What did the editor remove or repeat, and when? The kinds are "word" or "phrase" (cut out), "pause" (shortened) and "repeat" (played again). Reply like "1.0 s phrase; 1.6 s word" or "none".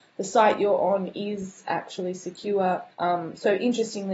2.9 s pause